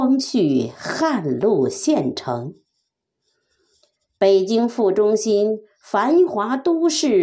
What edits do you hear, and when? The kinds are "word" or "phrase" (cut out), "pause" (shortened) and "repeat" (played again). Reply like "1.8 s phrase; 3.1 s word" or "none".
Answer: none